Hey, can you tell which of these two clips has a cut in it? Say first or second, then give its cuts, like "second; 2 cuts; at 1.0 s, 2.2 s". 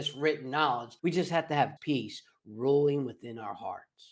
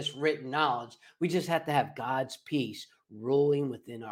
first; 2 cuts; at 1.0 s, 1.8 s